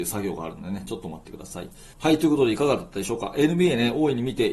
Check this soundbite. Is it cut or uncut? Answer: cut